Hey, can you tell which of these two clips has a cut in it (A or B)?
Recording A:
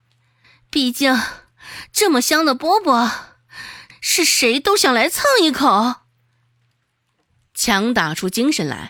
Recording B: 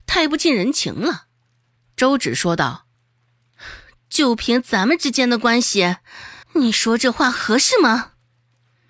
B